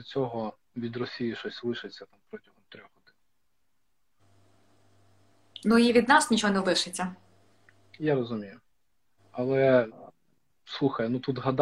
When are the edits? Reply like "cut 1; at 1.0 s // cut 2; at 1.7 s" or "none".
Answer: cut 1; at 9.1 s